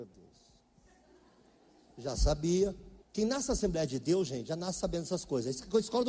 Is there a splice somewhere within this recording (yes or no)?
yes